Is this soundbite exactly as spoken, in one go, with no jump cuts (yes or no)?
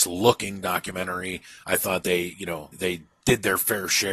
no